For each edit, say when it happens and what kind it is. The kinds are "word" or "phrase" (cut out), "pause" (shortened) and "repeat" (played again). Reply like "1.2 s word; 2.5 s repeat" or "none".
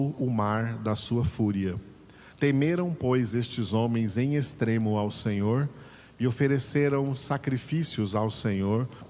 2.3 s pause